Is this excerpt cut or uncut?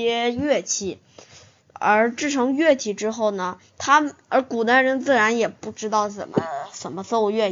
uncut